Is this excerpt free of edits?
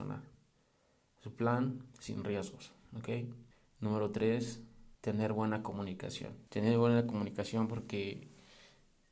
no; 3 cuts; at 3.5 s, 4.9 s, 6.5 s

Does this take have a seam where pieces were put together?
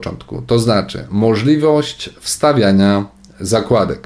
no; 0 cuts

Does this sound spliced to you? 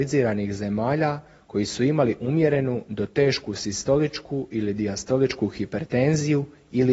no; 0 cuts

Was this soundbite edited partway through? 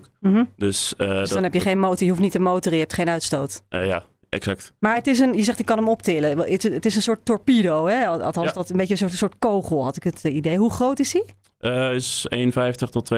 no; 0 cuts

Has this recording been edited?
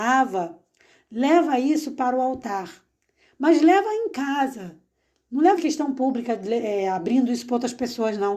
yes; 1 cut; at 5.6 s

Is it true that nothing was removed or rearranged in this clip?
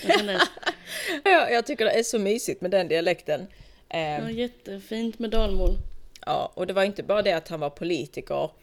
no; 1 cut; at 1.3 s

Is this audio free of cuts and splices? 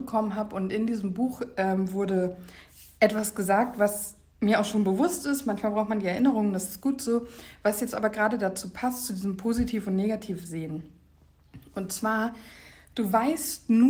yes; 0 cuts

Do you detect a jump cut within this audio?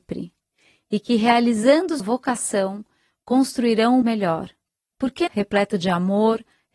yes; 3 cuts; at 2.0 s, 4.0 s, 5.3 s

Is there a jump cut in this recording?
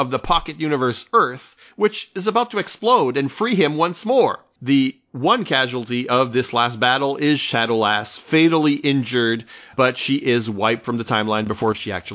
no; 0 cuts

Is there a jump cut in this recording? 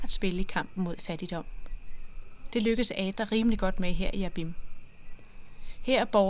no; 0 cuts

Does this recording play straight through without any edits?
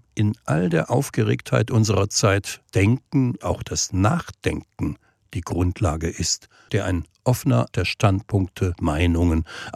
no; 5 cuts; at 2.7 s, 3.4 s, 6.7 s, 7.7 s, 8.8 s

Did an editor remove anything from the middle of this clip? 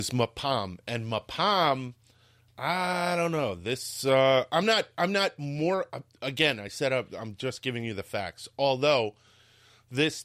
no; 0 cuts

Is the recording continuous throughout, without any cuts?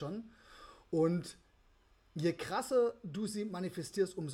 yes; 0 cuts

